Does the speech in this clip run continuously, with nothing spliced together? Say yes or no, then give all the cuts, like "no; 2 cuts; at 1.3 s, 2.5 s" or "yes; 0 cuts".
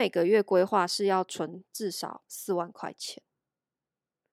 yes; 0 cuts